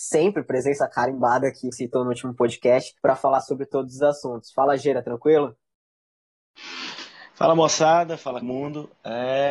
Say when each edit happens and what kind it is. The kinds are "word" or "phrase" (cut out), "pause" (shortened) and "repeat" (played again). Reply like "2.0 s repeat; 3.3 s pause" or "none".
1.7 s word; 3.0 s pause; 8.4 s phrase